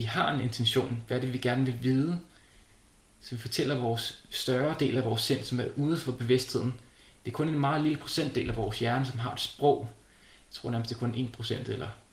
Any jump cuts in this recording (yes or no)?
no